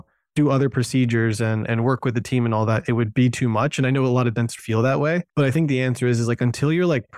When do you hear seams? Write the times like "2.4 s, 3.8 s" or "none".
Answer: 4.6 s, 5.3 s